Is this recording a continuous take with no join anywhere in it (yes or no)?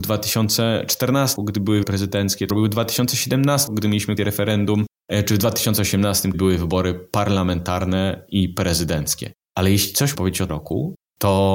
no